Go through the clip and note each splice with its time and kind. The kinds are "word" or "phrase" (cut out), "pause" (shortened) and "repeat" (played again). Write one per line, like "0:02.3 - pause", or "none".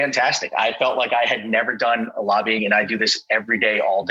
0:02.6 - word